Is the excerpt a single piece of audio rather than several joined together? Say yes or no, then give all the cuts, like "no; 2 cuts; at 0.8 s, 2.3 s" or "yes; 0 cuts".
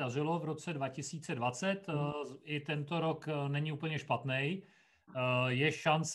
yes; 0 cuts